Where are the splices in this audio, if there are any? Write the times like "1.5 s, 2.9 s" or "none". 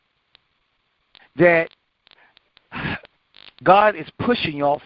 3.3 s